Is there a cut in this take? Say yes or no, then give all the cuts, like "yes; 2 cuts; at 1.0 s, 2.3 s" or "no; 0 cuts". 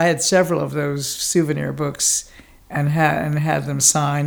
no; 0 cuts